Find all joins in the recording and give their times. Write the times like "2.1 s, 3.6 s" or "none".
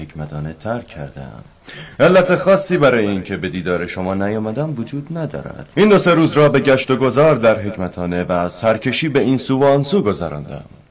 5.7 s